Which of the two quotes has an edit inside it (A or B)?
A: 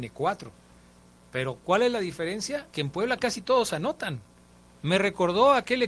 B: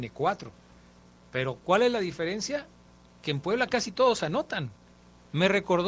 A